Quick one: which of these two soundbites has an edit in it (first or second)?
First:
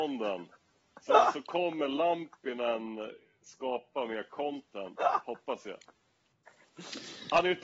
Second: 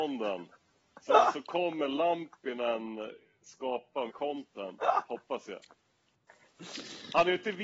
second